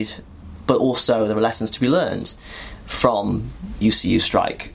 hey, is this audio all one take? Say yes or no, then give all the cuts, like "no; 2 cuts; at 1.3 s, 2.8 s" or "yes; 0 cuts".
no; 1 cut; at 3.8 s